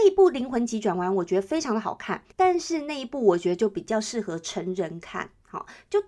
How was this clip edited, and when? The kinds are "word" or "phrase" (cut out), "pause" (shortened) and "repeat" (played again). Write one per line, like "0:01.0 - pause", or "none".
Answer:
0:02.3 - pause